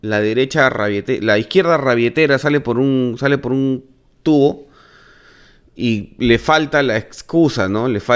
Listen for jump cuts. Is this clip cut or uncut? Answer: uncut